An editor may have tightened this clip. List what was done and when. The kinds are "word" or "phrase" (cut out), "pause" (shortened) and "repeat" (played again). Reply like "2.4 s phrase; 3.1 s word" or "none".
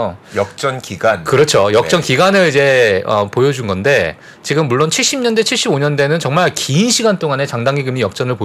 none